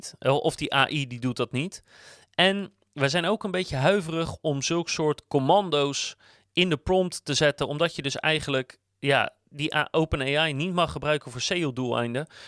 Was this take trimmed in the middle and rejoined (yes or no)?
no